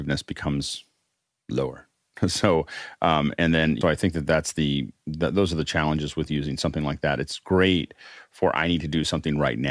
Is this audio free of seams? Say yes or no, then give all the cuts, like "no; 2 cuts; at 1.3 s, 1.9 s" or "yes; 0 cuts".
no; 1 cut; at 3.8 s